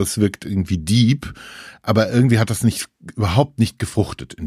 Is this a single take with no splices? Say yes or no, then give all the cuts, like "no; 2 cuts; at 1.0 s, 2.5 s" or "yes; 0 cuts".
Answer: yes; 0 cuts